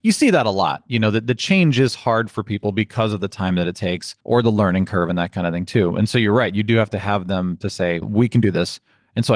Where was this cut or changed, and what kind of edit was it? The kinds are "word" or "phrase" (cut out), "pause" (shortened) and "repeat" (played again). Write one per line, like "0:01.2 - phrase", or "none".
0:04.2 - pause
0:08.0 - word